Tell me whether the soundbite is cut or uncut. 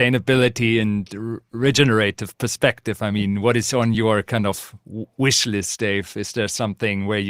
uncut